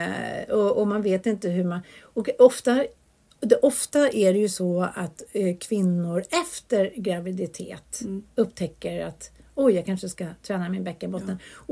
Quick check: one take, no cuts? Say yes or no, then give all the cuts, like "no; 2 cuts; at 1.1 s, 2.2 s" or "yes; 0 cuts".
yes; 0 cuts